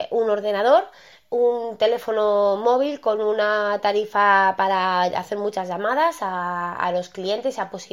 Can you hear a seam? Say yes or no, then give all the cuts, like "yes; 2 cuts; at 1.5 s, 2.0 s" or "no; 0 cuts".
no; 0 cuts